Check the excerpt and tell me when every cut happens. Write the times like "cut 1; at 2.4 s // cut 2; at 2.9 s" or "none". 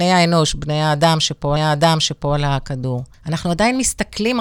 cut 1; at 1.6 s // cut 2; at 3.1 s